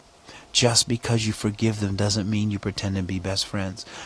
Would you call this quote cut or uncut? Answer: uncut